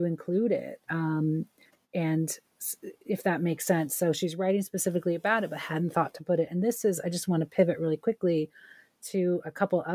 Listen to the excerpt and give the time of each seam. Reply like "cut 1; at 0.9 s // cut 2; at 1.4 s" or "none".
cut 1; at 1.7 s